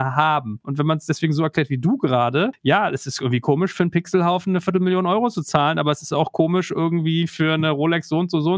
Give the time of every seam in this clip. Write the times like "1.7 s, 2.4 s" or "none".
none

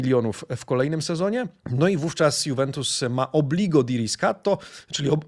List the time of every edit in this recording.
1.6 s

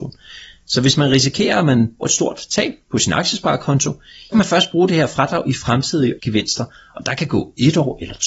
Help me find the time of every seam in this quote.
2.0 s, 4.3 s, 6.2 s

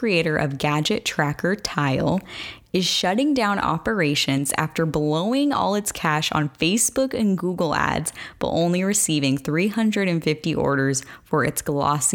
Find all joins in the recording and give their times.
none

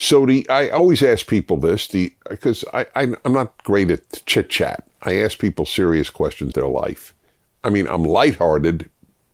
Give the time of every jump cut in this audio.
6.5 s

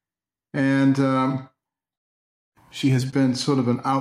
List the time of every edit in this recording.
none

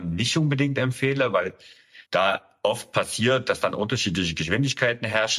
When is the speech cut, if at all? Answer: 2.1 s

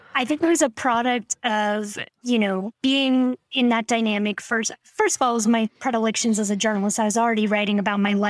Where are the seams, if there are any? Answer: 2.1 s, 2.7 s, 5.8 s

